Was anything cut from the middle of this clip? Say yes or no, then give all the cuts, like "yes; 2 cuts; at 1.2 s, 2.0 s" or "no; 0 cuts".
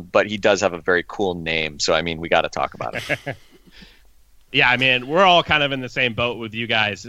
no; 0 cuts